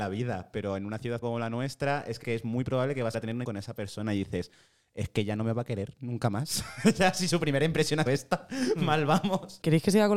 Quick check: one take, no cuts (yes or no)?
no